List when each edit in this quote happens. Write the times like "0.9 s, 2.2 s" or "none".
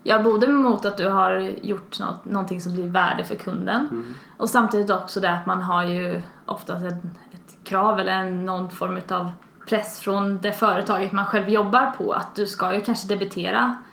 9.5 s